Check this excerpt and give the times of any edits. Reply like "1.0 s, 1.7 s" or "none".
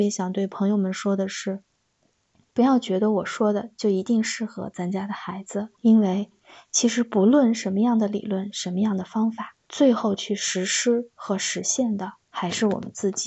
5.7 s, 9.6 s, 12.2 s